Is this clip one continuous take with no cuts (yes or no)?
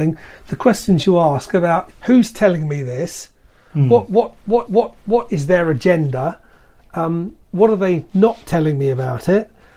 no